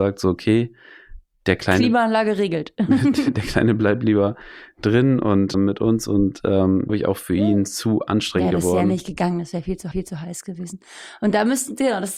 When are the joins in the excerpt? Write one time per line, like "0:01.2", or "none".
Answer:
0:05.5
0:06.9
0:09.9